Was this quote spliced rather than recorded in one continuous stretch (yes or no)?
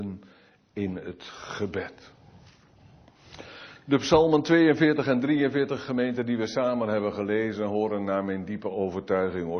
no